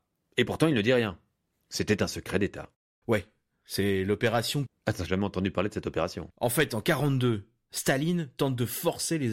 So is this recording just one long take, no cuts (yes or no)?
no